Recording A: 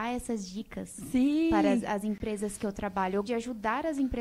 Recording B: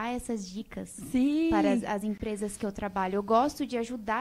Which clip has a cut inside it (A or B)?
A